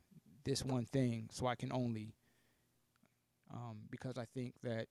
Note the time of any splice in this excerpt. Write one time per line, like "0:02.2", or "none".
none